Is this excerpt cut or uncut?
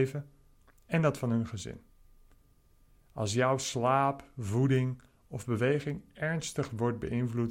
uncut